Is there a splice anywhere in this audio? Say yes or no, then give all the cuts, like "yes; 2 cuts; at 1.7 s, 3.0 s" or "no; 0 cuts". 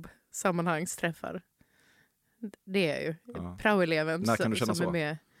no; 0 cuts